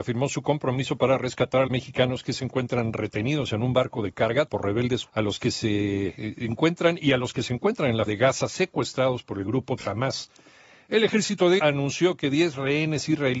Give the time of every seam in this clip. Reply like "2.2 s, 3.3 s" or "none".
1.7 s, 4.5 s, 5.1 s, 8.1 s, 9.8 s, 11.6 s